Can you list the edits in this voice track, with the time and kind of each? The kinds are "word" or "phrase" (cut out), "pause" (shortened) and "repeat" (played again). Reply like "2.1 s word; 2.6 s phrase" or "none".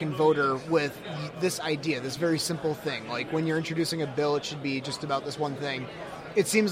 none